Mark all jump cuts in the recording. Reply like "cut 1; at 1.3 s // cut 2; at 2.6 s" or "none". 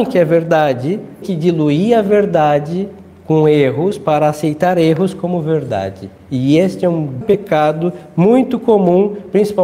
cut 1; at 1.2 s // cut 2; at 7.2 s